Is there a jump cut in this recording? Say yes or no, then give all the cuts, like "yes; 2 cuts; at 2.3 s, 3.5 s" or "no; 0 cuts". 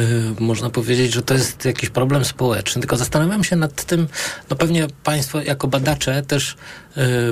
no; 0 cuts